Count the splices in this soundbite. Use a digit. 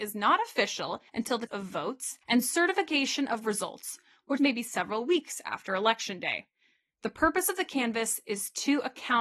4